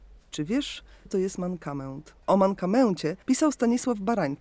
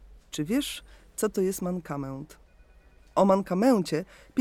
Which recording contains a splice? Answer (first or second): first